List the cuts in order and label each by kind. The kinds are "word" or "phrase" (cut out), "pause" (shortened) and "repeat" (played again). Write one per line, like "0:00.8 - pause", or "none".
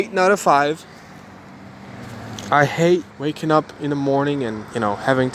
0:03.1 - pause